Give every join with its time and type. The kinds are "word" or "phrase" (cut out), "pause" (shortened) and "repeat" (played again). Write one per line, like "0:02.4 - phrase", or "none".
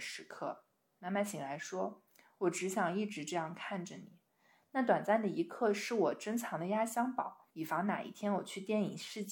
0:07.5 - pause